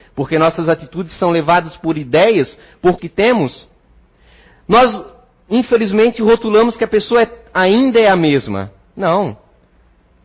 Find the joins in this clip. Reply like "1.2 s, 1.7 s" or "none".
3.0 s